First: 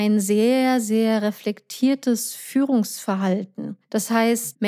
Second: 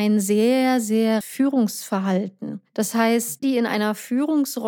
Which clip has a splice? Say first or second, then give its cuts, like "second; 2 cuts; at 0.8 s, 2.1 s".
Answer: second; 2 cuts; at 1.2 s, 3.4 s